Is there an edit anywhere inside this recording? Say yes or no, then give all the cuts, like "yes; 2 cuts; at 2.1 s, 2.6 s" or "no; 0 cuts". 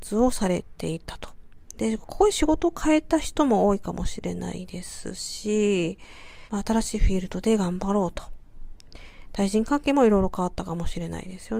yes; 1 cut; at 6.5 s